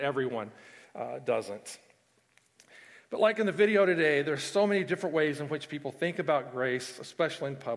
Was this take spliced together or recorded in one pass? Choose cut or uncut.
uncut